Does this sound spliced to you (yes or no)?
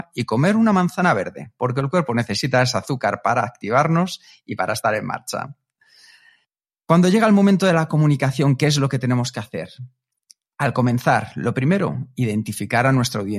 no